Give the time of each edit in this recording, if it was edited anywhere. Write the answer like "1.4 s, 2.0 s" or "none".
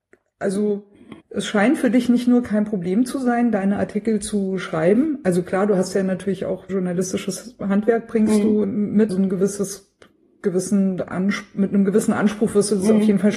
1.2 s, 6.7 s, 8.6 s, 9.1 s